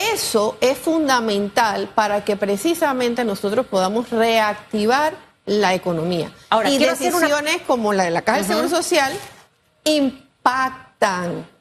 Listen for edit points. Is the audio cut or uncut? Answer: uncut